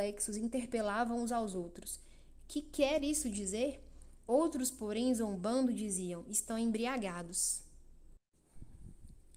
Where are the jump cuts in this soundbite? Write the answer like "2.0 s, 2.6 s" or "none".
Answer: none